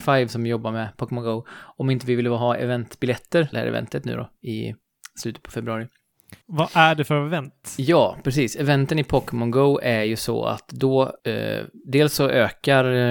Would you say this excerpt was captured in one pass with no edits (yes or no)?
no